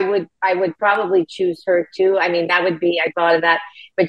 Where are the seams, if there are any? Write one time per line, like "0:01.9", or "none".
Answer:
0:03.1